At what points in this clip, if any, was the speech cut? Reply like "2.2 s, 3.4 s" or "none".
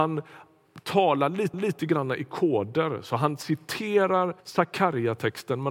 1.5 s, 4.4 s